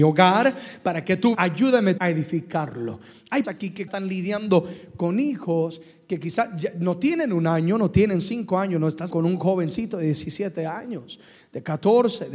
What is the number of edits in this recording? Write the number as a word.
five